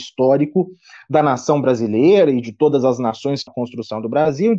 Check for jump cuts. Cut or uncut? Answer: cut